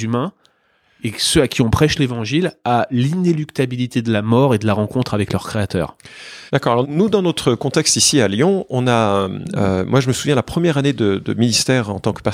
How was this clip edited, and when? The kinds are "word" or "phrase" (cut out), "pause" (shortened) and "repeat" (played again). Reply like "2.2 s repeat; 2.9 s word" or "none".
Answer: 6.5 s pause; 6.8 s word